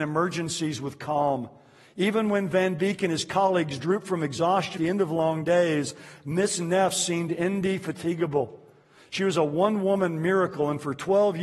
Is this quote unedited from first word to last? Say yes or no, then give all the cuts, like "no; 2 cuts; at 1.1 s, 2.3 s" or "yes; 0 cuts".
no; 1 cut; at 4.8 s